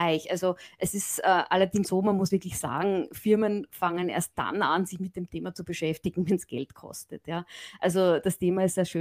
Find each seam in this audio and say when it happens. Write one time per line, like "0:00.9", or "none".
0:01.8
0:02.3